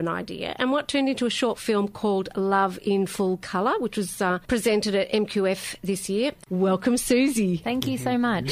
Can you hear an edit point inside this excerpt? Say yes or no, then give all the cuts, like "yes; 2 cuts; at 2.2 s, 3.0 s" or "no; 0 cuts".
no; 0 cuts